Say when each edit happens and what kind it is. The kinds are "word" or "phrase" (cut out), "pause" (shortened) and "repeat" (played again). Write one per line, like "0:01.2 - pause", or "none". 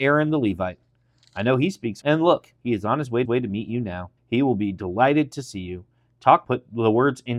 0:02.0 - word
0:02.6 - pause
0:03.2 - repeat
0:04.2 - pause
0:06.4 - phrase